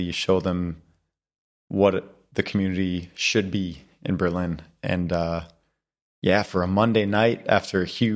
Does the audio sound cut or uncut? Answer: uncut